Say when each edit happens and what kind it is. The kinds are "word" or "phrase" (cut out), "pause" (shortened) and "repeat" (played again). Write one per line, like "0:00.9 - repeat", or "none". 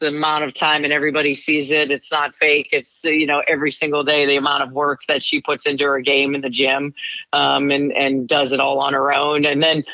none

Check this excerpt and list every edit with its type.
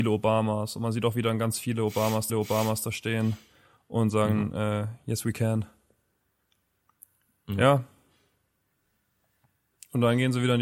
0:02.3 - repeat

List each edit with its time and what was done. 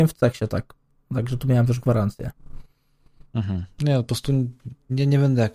none

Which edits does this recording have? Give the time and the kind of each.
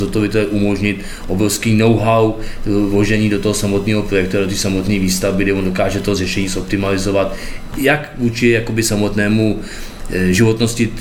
none

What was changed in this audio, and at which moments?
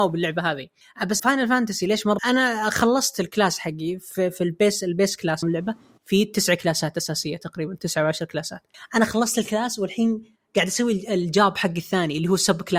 0:01.2 - word
0:02.2 - phrase
0:05.4 - phrase

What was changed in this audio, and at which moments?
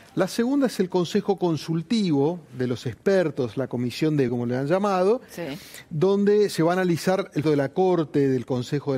0:04.3 - word
0:07.4 - word

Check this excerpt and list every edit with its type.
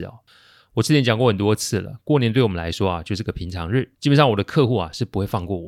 0:03.9 - pause

